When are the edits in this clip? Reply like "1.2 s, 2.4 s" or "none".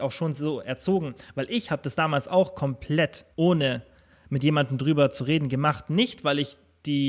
3.3 s